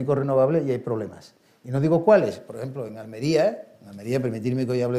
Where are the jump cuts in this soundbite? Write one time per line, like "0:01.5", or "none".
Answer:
none

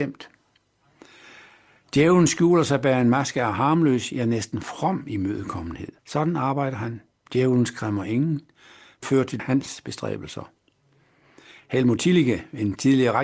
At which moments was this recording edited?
0:06.0
0:07.1
0:09.0
0:09.4

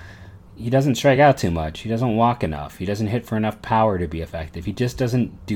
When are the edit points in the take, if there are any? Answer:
none

